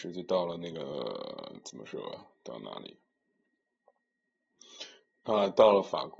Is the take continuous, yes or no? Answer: yes